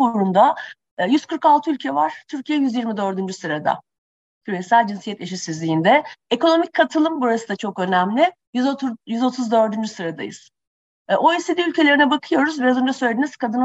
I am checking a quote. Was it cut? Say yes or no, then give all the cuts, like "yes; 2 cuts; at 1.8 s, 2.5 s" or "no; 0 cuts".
no; 0 cuts